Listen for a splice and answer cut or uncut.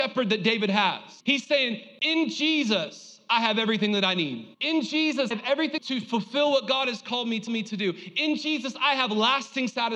cut